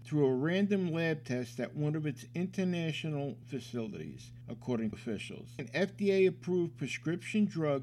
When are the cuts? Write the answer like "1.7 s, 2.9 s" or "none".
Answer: 3.4 s, 4.9 s, 5.6 s

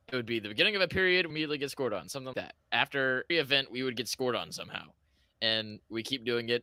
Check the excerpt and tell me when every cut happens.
1.3 s, 2.3 s, 3.3 s

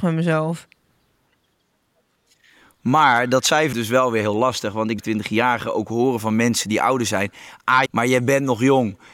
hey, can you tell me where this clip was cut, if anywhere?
3.7 s, 5.0 s, 7.9 s

